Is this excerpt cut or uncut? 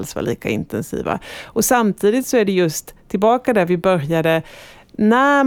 uncut